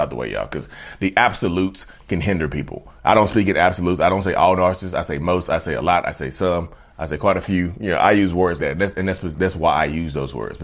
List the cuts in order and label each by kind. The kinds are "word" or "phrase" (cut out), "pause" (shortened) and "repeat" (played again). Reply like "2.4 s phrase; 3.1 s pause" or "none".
2.9 s pause; 8.6 s word